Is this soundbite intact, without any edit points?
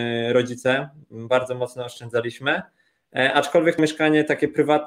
no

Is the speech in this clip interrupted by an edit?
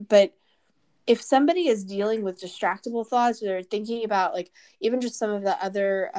no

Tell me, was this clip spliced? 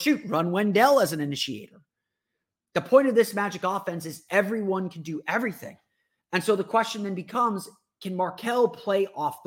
no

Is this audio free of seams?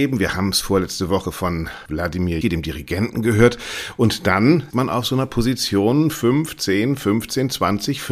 no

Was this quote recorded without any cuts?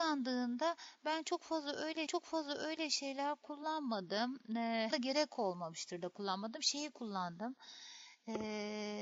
no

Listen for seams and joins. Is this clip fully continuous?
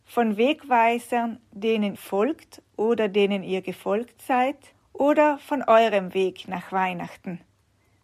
no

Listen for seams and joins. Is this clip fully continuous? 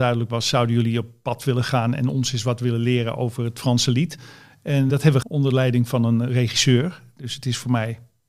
no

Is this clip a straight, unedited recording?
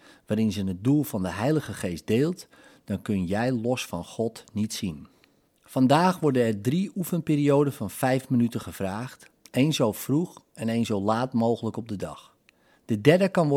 yes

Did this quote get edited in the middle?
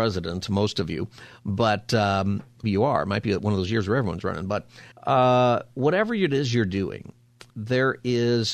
yes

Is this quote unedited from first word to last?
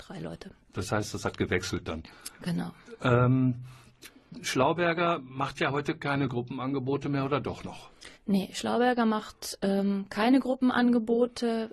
no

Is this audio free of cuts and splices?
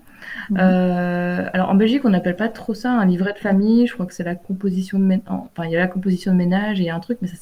yes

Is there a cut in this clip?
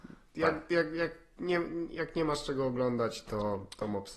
no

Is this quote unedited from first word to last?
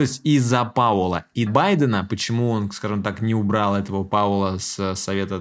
no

